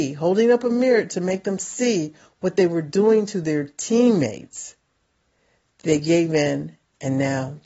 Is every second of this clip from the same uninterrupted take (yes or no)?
yes